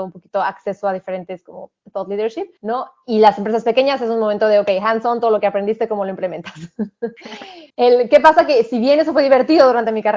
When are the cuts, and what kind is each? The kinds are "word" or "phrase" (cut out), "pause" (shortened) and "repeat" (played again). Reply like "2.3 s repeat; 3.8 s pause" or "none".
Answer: 1.8 s pause; 2.6 s pause; 7.7 s pause